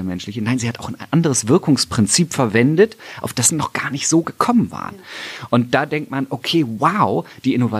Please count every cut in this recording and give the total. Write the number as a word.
one